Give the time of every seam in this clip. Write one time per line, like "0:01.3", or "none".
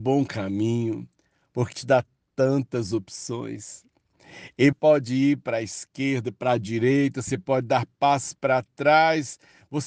0:01.7
0:04.7